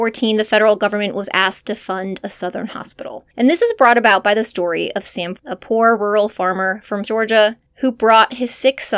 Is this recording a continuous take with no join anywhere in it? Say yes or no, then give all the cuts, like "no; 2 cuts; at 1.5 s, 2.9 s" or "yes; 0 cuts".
no; 2 cuts; at 5.4 s, 7.0 s